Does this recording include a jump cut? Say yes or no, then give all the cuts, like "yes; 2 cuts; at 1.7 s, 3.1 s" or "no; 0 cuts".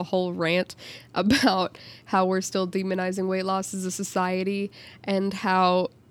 no; 0 cuts